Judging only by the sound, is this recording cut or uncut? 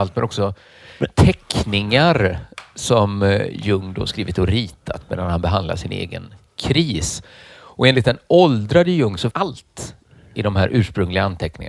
cut